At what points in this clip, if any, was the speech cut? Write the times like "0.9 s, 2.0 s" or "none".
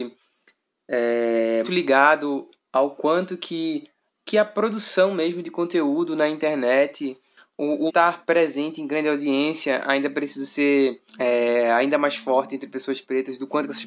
1.6 s, 4.1 s, 7.9 s, 11.1 s